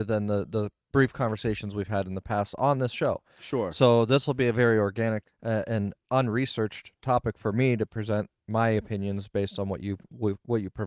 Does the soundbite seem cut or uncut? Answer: cut